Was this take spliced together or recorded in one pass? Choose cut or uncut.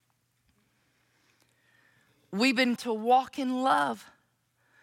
cut